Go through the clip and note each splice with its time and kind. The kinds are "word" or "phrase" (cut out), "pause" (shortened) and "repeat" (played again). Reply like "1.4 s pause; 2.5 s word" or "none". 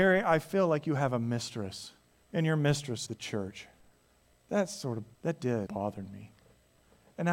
2.1 s pause; 3.1 s word; 4.0 s pause; 5.1 s pause; 5.7 s word